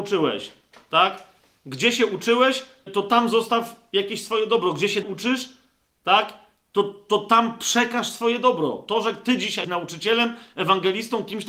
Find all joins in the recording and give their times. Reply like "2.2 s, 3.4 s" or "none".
2.9 s, 5.0 s, 9.6 s